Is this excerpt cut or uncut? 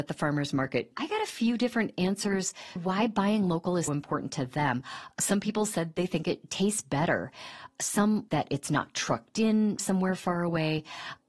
cut